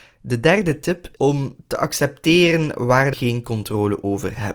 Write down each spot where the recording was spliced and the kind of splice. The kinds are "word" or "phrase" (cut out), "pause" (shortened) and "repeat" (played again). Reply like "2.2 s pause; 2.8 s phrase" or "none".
1.2 s word; 3.1 s word